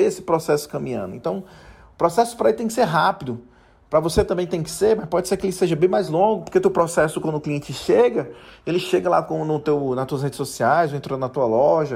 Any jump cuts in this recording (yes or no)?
no